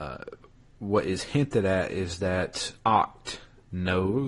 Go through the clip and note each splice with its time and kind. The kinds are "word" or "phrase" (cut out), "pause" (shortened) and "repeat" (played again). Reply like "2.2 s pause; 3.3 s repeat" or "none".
2.8 s pause